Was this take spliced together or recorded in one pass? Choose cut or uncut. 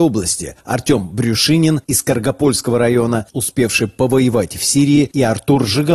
uncut